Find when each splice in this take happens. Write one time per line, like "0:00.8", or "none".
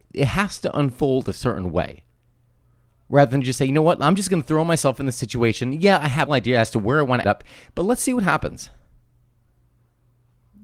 0:06.3
0:07.2